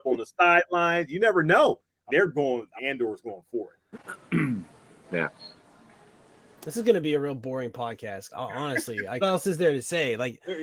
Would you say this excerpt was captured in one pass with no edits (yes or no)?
no